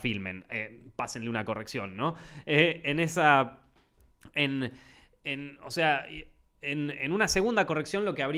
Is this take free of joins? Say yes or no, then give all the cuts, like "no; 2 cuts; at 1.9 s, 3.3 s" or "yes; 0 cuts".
yes; 0 cuts